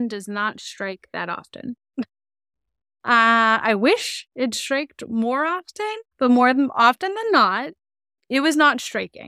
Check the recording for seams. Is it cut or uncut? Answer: cut